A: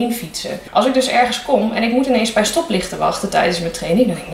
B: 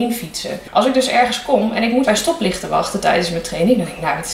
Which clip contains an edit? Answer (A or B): B